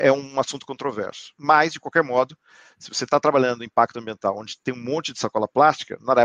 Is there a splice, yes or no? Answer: no